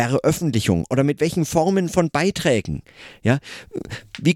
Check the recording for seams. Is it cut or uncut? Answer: uncut